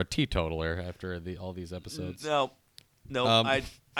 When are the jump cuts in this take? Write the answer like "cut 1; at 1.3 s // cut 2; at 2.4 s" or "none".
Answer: none